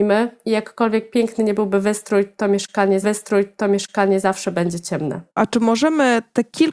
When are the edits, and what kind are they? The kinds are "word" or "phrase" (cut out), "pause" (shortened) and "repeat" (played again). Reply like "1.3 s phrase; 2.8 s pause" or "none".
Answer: 3.0 s repeat; 5.3 s pause